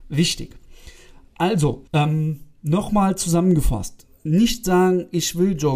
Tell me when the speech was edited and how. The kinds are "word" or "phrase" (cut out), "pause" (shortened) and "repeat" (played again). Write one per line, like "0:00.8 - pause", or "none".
0:01.9 - pause